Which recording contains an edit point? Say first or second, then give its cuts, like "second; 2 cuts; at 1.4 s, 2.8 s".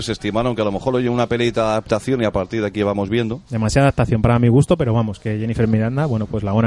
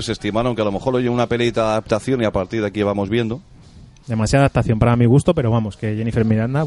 first; 1 cut; at 3.5 s